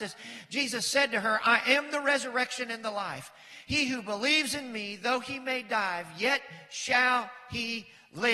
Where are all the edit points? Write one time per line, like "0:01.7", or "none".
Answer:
none